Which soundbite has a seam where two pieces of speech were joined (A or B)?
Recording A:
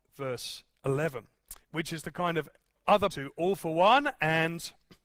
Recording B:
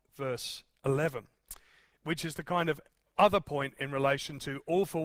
A